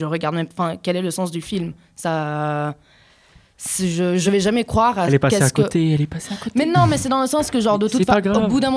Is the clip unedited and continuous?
yes; 0 cuts

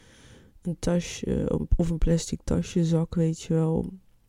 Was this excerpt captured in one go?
yes; 0 cuts

